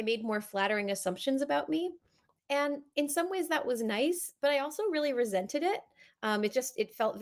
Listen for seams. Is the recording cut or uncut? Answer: uncut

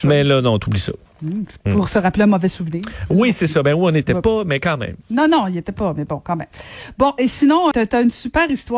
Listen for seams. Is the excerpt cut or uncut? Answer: cut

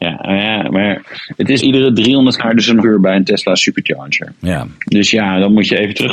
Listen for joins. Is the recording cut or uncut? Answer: cut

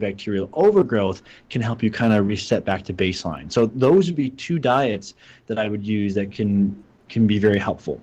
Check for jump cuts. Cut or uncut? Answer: uncut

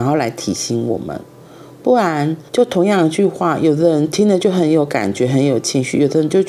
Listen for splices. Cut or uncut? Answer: cut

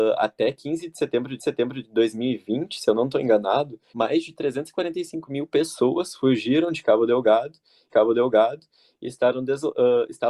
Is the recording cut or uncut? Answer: cut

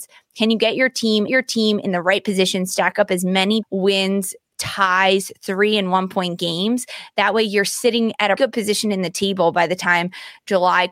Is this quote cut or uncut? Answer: cut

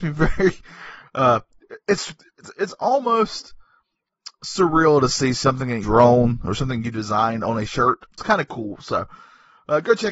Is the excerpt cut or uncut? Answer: cut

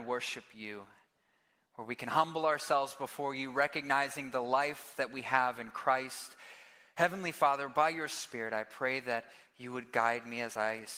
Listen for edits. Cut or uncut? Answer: uncut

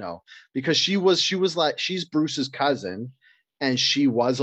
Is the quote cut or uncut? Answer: uncut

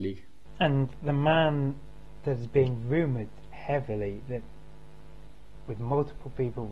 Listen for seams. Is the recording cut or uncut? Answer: uncut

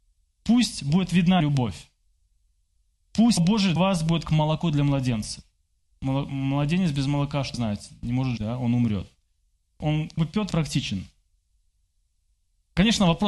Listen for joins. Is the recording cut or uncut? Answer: cut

